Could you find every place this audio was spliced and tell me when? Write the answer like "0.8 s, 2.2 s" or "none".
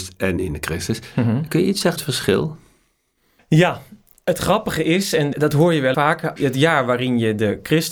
2.0 s, 5.3 s, 5.9 s, 6.4 s